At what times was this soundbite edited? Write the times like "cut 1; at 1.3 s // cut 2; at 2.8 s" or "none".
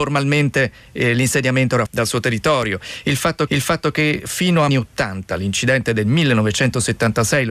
cut 1; at 1.9 s // cut 2; at 3.5 s // cut 3; at 4.7 s

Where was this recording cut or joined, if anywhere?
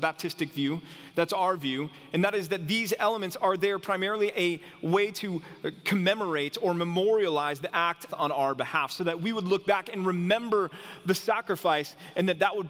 cut 1; at 4.3 s // cut 2; at 8.1 s

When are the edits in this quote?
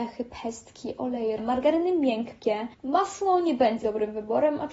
cut 1; at 1.4 s // cut 2; at 2.7 s // cut 3; at 3.8 s

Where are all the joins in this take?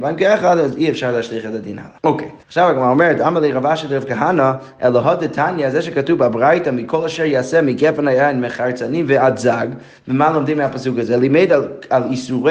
cut 1; at 2.0 s // cut 2; at 2.4 s

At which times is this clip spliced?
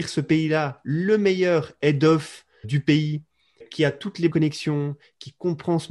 cut 1; at 2.6 s // cut 2; at 3.6 s // cut 3; at 4.3 s

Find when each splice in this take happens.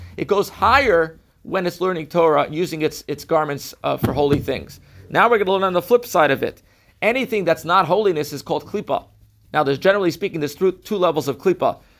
none

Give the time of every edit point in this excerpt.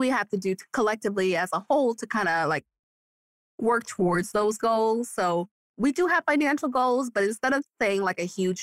none

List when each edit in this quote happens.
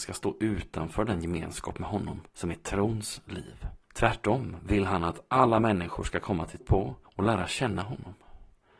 cut 1; at 2.3 s // cut 2; at 3.8 s // cut 3; at 6.6 s

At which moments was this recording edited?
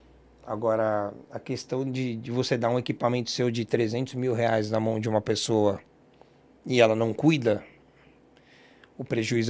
none

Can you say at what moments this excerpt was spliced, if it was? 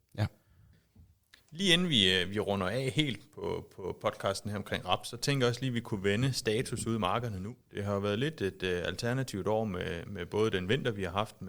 cut 1; at 7.6 s

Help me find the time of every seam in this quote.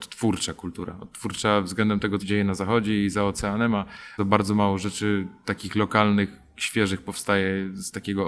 cut 1; at 2.2 s // cut 2; at 4.2 s

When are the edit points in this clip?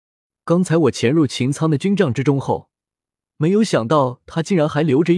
none

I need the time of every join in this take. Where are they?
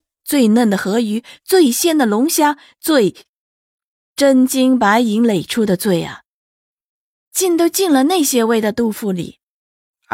none

